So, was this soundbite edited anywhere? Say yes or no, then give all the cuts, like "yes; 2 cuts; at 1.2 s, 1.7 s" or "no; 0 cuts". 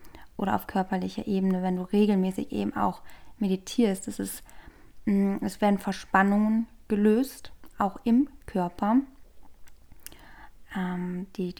no; 0 cuts